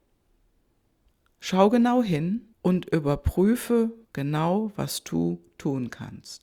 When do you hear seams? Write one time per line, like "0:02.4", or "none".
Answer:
0:02.5
0:04.0